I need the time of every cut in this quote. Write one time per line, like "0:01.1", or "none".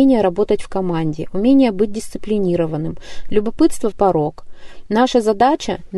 0:03.9